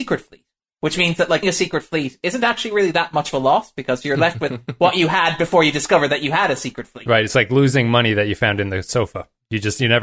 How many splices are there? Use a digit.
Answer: 1